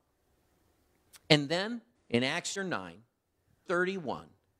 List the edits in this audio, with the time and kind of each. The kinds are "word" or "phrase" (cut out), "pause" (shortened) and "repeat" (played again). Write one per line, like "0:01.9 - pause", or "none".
0:02.0 - pause
0:02.6 - word
0:03.7 - phrase